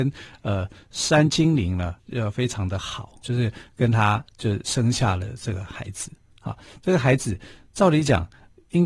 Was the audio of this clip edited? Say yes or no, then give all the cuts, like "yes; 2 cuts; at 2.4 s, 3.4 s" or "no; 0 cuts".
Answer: yes; 2 cuts; at 2.0 s, 3.2 s